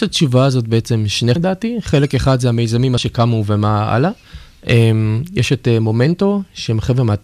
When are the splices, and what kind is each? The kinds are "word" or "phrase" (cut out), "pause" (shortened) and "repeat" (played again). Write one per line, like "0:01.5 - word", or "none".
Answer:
0:01.4 - word
0:03.0 - word